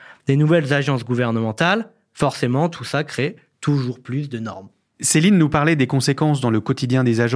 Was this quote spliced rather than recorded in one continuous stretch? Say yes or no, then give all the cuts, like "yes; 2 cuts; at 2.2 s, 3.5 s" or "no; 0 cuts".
no; 0 cuts